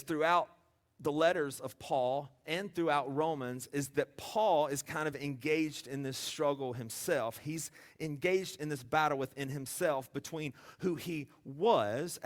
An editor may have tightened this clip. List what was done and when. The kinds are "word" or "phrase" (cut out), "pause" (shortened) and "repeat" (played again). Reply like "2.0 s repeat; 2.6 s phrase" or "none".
none